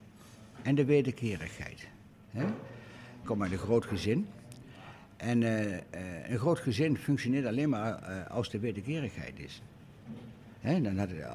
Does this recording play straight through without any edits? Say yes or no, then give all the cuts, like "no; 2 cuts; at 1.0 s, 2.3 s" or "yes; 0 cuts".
yes; 0 cuts